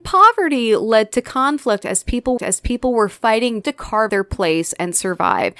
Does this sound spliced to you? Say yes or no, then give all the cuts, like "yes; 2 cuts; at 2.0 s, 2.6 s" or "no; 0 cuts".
yes; 3 cuts; at 2.4 s, 3.6 s, 4.1 s